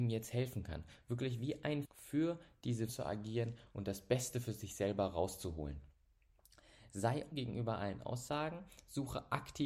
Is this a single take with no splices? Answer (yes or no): no